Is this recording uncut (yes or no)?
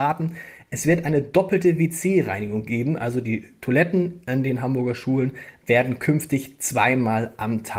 yes